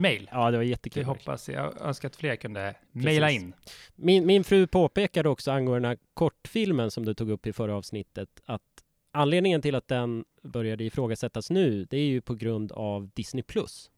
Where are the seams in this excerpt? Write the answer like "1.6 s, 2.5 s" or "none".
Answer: 2.8 s, 10.3 s